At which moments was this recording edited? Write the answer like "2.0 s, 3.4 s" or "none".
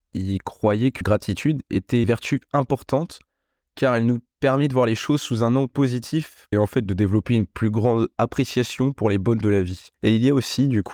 1.0 s, 2.0 s, 5.7 s, 6.5 s, 9.4 s, 9.9 s